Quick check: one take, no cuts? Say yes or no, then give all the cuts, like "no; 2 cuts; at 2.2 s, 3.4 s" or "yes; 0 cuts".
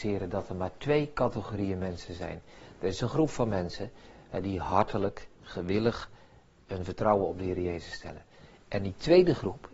yes; 0 cuts